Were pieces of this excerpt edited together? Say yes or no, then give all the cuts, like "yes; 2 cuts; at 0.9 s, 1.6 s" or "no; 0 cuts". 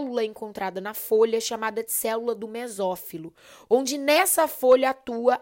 no; 0 cuts